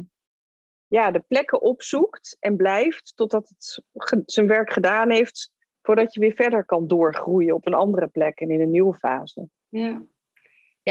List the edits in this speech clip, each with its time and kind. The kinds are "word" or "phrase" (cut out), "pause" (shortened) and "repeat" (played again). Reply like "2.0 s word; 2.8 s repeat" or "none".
6.7 s word